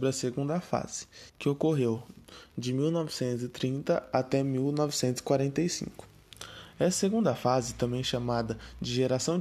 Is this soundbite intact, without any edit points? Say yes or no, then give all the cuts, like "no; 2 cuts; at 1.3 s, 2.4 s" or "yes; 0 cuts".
no; 1 cut; at 1.3 s